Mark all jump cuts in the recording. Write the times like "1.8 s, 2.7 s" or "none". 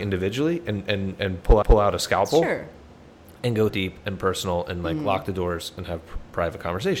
1.6 s, 3.7 s